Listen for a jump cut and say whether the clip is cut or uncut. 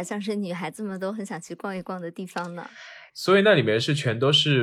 cut